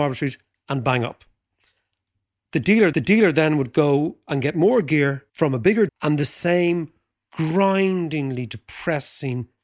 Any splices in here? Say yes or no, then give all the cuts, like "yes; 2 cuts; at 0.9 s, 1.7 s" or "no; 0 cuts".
yes; 3 cuts; at 2.9 s, 5.3 s, 5.9 s